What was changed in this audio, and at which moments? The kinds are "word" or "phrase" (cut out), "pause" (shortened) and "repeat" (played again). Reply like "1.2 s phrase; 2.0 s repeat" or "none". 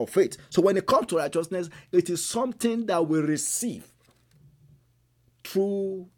none

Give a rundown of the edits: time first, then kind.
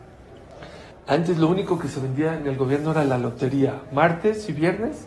0.9 s pause

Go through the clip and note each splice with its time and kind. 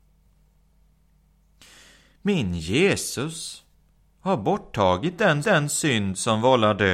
5.4 s repeat

